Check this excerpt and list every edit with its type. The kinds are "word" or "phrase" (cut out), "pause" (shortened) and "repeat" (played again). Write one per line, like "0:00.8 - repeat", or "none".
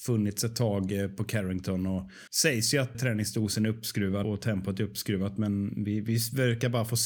0:02.3 - pause
0:02.9 - word
0:04.2 - word